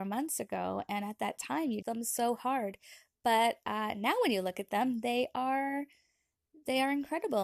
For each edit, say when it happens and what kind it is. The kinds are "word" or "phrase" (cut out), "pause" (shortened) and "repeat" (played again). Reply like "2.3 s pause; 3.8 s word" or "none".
1.8 s word